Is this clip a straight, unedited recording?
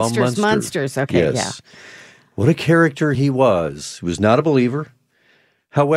yes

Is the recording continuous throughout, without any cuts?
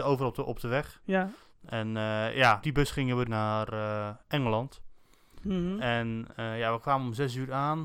no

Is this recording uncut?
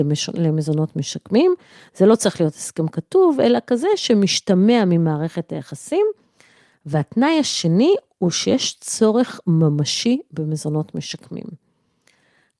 yes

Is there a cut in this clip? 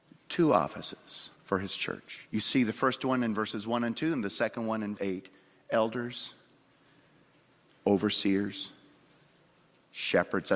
yes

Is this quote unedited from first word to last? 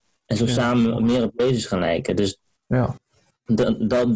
yes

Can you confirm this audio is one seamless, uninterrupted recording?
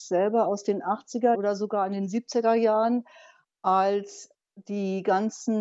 no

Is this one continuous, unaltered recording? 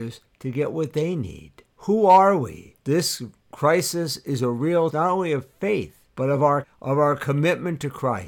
no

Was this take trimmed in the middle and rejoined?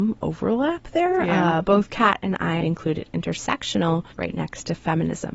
yes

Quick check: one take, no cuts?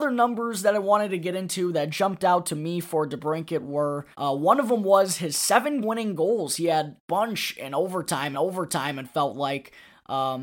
no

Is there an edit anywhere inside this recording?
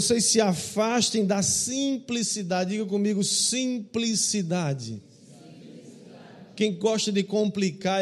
no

